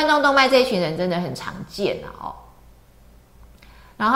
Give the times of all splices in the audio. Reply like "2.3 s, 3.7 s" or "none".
none